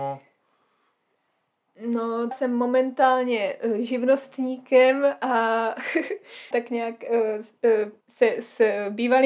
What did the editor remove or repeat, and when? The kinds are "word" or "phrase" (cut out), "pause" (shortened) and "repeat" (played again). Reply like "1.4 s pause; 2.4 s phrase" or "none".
2.3 s word; 6.5 s word; 8.0 s pause